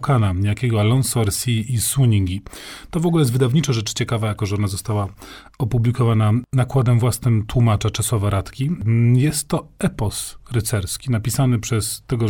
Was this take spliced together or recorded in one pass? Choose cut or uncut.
uncut